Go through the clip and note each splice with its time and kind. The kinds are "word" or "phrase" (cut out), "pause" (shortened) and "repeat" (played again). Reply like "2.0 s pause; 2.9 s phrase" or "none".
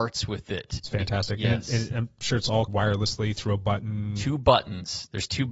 2.2 s word; 2.7 s word